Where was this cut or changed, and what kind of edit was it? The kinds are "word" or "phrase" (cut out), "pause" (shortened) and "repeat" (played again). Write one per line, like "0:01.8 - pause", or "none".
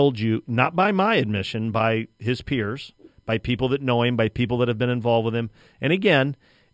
none